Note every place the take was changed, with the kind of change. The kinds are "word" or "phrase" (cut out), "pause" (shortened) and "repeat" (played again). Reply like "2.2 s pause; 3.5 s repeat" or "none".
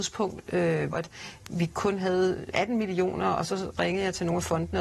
0.9 s word; 2.5 s word